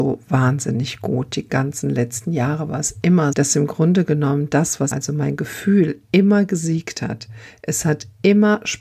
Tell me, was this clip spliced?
yes; 3 cuts; at 1.5 s, 3.3 s, 4.9 s

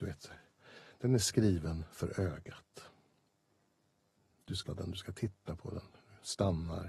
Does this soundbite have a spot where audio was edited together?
yes; 1 cut; at 4.7 s

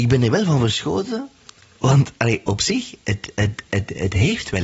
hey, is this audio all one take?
yes; 0 cuts

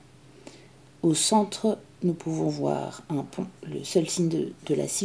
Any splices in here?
yes; 1 cut; at 3.6 s

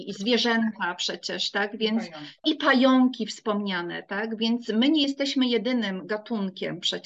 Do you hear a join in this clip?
no; 0 cuts

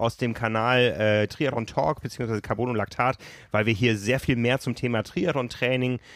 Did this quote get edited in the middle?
no; 0 cuts

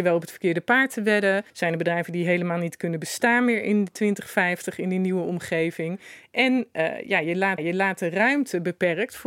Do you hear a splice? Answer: yes; 2 cuts; at 1.5 s, 7.6 s

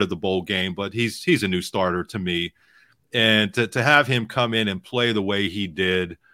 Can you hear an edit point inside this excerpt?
no; 0 cuts

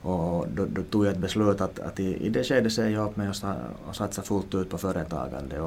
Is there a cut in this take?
no; 0 cuts

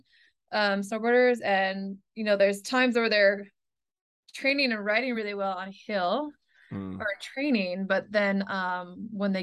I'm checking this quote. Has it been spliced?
no; 0 cuts

